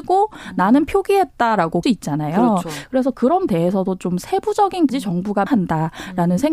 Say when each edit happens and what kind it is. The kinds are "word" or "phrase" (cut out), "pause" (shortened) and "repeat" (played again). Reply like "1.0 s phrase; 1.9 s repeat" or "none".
1.8 s phrase; 3.5 s word; 4.9 s word; 5.5 s word